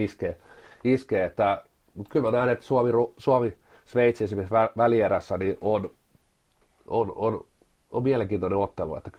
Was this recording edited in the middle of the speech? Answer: no; 0 cuts

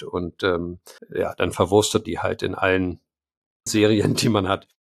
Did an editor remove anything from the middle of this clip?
yes; 3 cuts; at 1.0 s, 2.0 s, 3.7 s

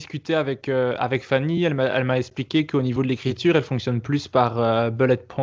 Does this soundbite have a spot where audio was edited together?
no; 0 cuts

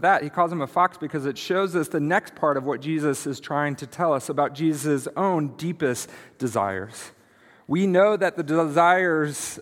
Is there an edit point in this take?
no; 0 cuts

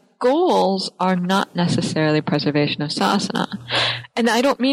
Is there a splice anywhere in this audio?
no; 0 cuts

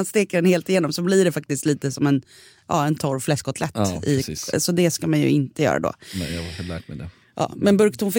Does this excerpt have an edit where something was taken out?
no; 0 cuts

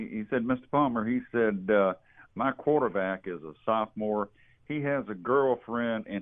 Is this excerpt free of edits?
yes; 0 cuts

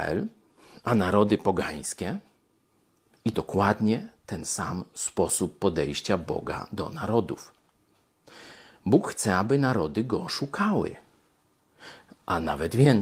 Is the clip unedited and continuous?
no; 1 cut; at 3.3 s

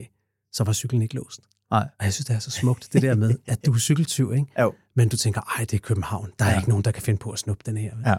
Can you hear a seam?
no; 0 cuts

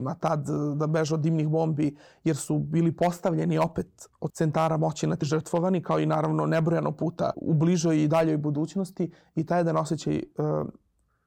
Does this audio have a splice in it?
yes; 3 cuts; at 4.3 s, 5.2 s, 7.3 s

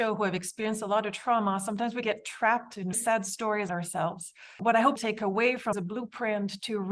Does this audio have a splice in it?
yes; 5 cuts; at 2.0 s, 2.9 s, 3.7 s, 5.0 s, 5.7 s

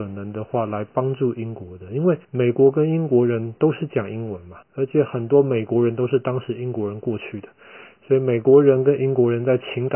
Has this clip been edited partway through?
yes; 2 cuts; at 2.2 s, 4.6 s

